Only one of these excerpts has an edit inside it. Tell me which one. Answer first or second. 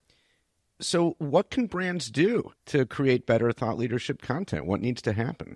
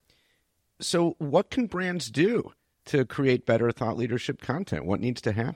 first